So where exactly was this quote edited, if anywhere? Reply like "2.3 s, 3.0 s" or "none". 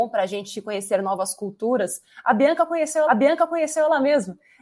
3.1 s